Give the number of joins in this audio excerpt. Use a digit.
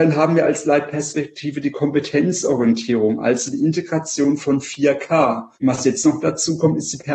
1